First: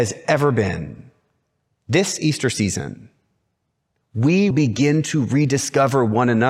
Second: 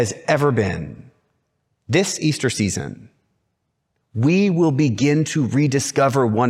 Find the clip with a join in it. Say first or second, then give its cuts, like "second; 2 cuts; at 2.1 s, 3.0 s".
first; 1 cut; at 4.5 s